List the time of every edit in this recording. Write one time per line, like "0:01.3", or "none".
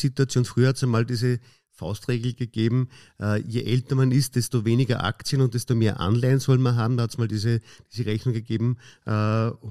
none